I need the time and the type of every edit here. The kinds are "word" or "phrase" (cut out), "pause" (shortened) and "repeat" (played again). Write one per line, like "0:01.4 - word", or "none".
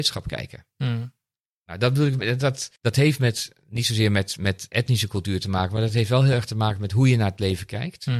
0:02.8 - pause